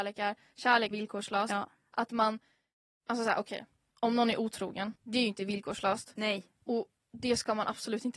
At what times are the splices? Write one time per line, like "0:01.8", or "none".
0:00.9
0:03.9
0:05.0